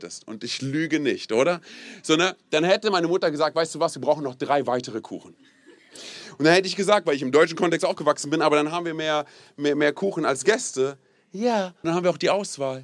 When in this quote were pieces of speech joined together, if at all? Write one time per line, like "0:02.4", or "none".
0:11.8